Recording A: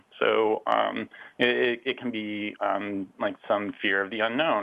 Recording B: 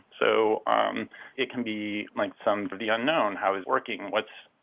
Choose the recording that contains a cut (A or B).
B